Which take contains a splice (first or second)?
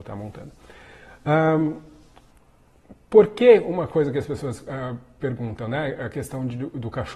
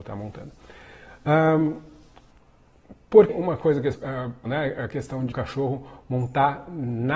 second